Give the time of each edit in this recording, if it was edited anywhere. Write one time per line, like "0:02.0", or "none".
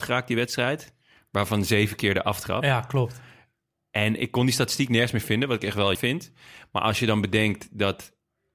0:05.9